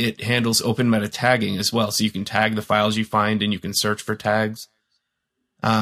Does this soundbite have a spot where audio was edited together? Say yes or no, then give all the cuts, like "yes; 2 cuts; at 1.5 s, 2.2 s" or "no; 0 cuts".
no; 0 cuts